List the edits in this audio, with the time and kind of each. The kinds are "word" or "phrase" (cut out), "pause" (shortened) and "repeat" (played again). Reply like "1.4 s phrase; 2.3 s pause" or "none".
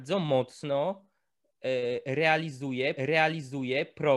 3.0 s repeat